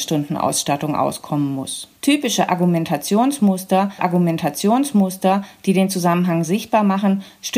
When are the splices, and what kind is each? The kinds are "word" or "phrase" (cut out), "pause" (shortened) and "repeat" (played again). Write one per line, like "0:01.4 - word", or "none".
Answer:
0:02.0 - pause
0:04.0 - repeat